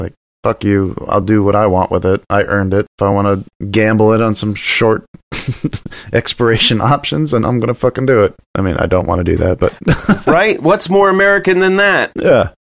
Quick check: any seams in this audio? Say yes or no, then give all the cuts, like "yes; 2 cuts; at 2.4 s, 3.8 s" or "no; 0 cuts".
no; 0 cuts